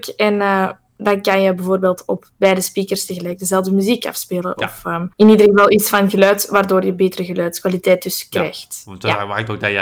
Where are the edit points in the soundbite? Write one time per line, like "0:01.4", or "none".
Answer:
0:05.1